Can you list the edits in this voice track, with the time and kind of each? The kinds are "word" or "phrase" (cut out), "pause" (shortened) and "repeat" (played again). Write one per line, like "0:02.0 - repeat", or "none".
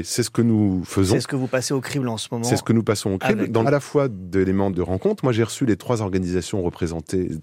0:03.6 - phrase
0:04.7 - word